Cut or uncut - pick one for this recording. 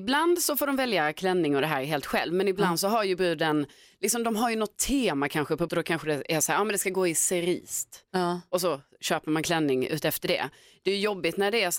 cut